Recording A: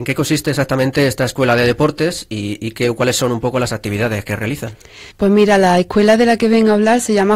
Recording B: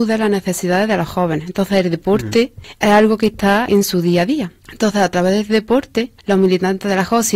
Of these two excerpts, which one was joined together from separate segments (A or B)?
B